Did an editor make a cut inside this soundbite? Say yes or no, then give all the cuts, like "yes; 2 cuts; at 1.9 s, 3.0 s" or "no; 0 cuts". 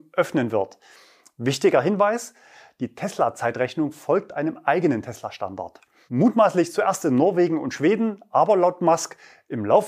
no; 0 cuts